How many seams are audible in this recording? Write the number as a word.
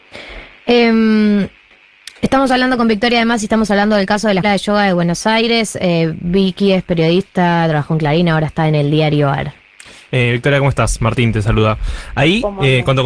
one